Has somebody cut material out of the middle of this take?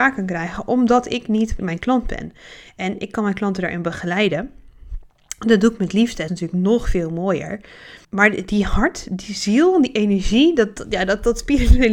yes; 3 cuts; at 1.6 s, 6.3 s, 8.0 s

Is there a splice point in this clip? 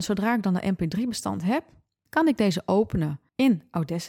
no; 0 cuts

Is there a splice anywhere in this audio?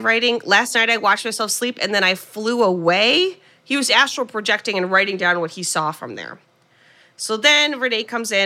no; 0 cuts

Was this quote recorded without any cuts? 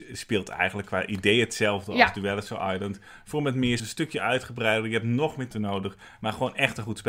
no; 2 cuts; at 3.8 s, 5.5 s

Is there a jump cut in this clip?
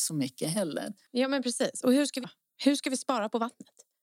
yes; 1 cut; at 2.2 s

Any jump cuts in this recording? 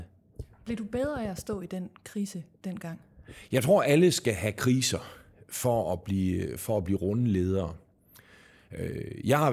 no; 0 cuts

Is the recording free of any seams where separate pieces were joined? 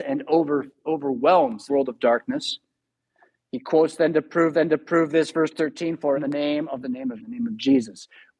no; 5 cuts; at 1.7 s, 4.5 s, 6.1 s, 6.8 s, 7.2 s

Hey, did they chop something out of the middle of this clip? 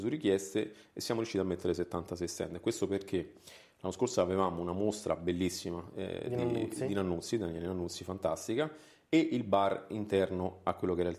no; 0 cuts

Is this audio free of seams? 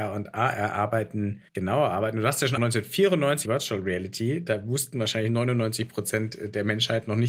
no; 3 cuts; at 1.5 s, 2.6 s, 3.5 s

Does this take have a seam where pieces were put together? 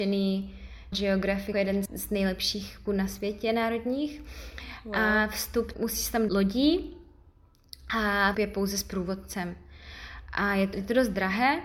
yes; 8 cuts; at 0.9 s, 1.5 s, 1.9 s, 2.9 s, 5.7 s, 6.3 s, 8.3 s, 10.7 s

